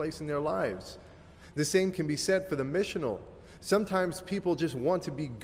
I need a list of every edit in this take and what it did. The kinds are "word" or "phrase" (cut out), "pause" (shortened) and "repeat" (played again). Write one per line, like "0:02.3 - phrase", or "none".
0:01.9 - word